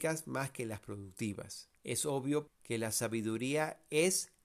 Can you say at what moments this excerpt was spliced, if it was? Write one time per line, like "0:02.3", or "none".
0:01.8
0:02.5

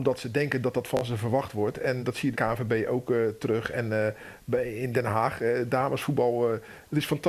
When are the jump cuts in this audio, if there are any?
0:02.0
0:02.3

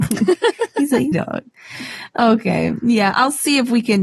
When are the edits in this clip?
0:01.1

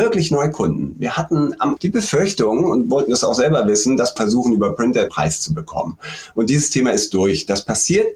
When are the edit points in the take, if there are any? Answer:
0:01.8
0:04.2
0:05.1

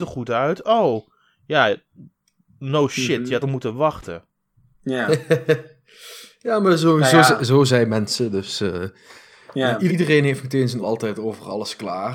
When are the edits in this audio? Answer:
0:03.4
0:09.9
0:10.8

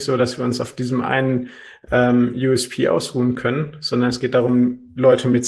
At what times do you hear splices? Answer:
none

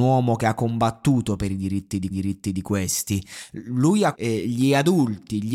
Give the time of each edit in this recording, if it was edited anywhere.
0:02.1
0:04.1

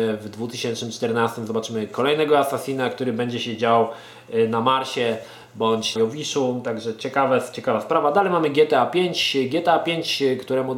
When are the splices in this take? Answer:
0:06.0

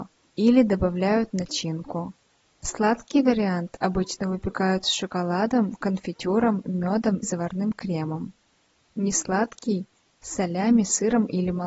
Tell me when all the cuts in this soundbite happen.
0:07.2

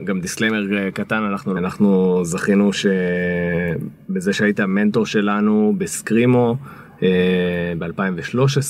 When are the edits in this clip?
0:01.6

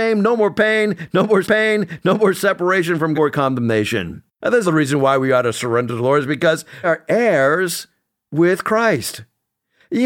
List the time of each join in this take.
0:01.4
0:03.1
0:04.3
0:04.6
0:06.8

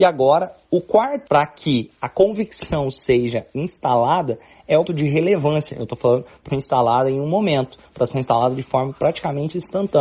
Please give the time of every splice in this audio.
0:01.3
0:04.9
0:06.5

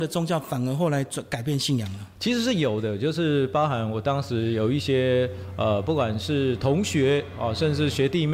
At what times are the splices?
none

